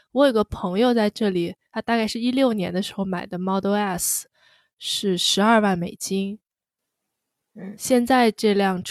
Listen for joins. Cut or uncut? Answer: uncut